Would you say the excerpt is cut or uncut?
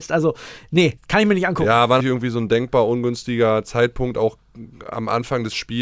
cut